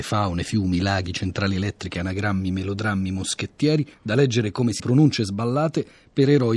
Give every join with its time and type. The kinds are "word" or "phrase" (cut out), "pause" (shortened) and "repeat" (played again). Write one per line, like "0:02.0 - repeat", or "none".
0:03.9 - pause
0:04.8 - word